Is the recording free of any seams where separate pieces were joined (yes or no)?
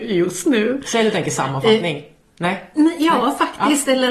yes